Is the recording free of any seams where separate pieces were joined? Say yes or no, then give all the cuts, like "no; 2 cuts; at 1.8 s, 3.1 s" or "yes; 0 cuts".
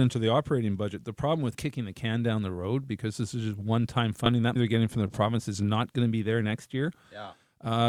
no; 2 cuts; at 1.5 s, 4.6 s